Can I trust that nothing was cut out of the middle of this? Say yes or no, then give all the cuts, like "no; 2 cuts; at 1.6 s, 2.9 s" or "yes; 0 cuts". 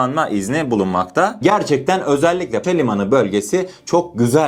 no; 1 cut; at 2.6 s